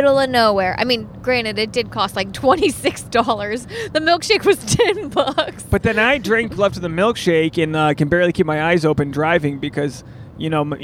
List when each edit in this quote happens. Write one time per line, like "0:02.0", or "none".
0:06.6